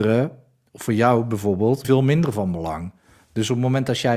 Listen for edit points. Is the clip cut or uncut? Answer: cut